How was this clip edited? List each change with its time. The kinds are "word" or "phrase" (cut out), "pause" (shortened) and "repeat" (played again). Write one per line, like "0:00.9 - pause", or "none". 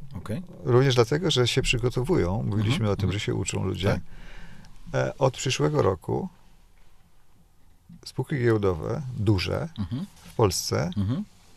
0:10.2 - pause

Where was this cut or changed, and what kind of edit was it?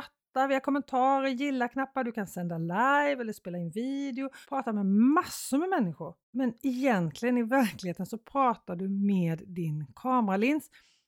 0:04.4 - pause
0:06.2 - pause

